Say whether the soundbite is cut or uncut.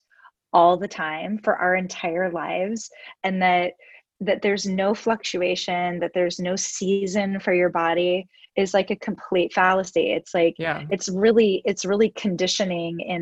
uncut